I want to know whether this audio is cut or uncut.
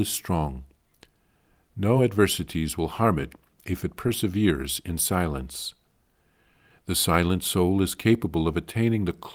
uncut